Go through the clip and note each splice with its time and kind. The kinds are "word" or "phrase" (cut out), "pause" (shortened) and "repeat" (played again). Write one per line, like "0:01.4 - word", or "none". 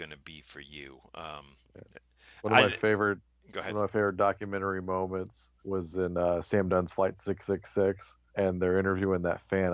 0:05.6 - pause
0:08.3 - pause